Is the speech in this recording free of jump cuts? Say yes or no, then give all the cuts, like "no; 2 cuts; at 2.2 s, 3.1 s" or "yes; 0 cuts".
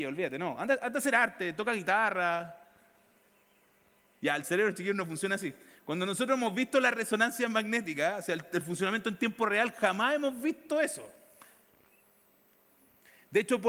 yes; 0 cuts